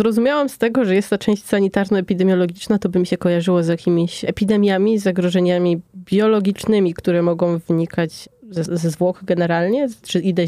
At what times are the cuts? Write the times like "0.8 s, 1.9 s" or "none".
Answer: 8.7 s